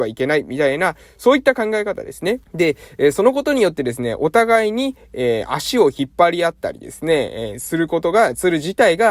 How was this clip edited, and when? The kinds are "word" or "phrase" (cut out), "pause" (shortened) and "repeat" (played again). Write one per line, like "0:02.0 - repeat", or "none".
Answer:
0:02.4 - pause